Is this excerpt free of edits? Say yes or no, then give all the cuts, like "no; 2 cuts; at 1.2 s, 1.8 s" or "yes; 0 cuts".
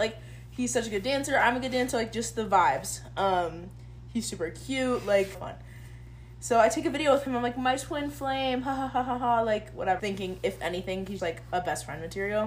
no; 3 cuts; at 5.3 s, 10.0 s, 11.2 s